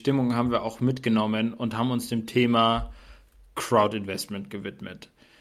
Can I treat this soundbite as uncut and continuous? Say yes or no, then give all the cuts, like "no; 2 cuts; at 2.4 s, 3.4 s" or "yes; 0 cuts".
yes; 0 cuts